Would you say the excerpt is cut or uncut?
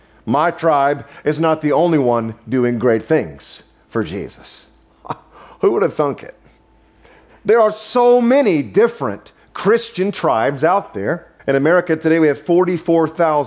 cut